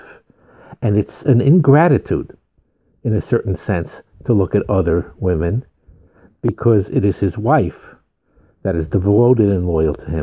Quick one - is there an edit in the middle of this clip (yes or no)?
no